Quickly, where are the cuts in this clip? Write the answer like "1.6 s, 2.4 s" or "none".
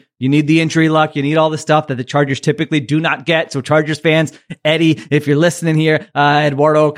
none